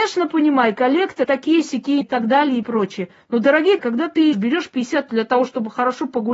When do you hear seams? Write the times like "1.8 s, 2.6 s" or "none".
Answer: 1.2 s, 2.0 s, 2.6 s, 3.8 s, 4.3 s, 5.1 s